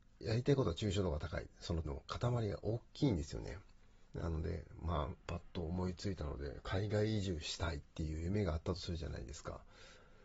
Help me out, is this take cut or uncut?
cut